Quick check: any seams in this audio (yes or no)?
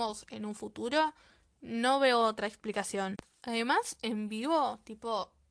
no